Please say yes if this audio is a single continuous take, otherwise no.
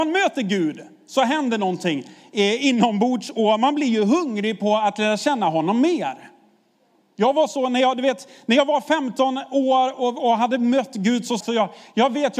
no